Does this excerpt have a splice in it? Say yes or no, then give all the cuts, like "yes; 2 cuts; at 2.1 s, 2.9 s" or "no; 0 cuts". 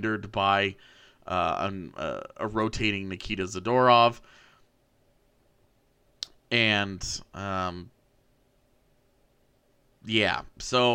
no; 0 cuts